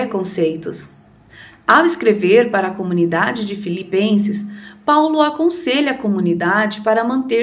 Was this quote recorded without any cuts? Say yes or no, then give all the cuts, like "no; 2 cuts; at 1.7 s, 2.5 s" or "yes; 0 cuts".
yes; 0 cuts